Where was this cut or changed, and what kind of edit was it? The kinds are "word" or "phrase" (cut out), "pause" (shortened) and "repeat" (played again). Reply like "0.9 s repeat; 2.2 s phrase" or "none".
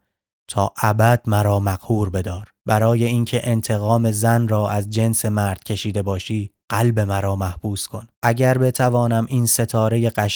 2.6 s pause; 6.6 s pause; 8.1 s pause